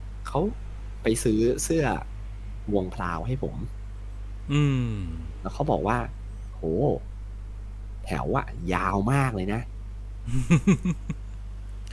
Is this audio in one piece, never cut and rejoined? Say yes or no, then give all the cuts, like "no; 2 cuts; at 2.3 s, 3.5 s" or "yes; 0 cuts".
yes; 0 cuts